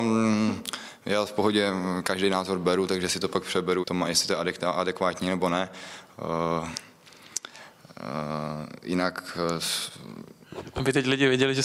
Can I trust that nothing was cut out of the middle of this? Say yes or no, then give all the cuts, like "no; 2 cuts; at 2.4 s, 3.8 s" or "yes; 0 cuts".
no; 1 cut; at 3.8 s